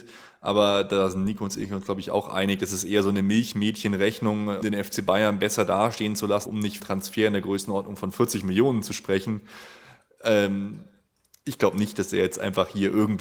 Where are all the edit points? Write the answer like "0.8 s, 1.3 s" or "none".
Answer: 4.6 s, 6.5 s, 6.8 s